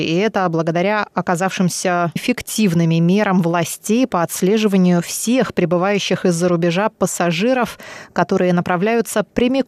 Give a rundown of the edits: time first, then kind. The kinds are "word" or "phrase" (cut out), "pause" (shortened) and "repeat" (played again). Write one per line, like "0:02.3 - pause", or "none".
0:02.2 - word